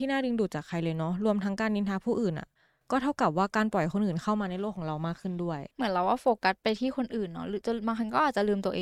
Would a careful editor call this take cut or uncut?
uncut